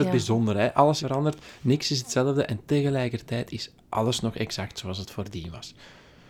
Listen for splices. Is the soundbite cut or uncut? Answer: cut